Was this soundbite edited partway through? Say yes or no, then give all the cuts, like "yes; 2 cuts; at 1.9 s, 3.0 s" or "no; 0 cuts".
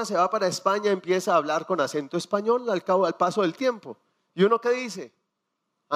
no; 0 cuts